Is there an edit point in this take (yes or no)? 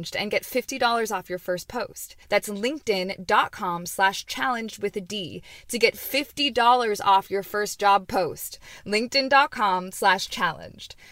yes